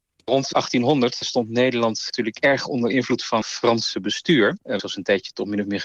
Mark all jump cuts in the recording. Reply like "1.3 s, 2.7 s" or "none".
3.4 s, 4.8 s